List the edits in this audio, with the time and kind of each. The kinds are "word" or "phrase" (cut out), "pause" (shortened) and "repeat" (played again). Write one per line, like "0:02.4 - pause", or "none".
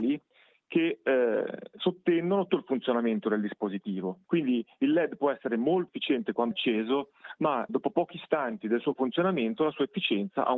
0:02.5 - word
0:04.3 - pause
0:05.9 - word
0:06.5 - word
0:07.7 - word